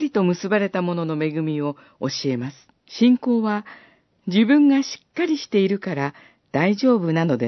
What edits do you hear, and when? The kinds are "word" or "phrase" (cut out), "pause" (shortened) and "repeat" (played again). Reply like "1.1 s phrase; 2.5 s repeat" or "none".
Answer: 2.8 s pause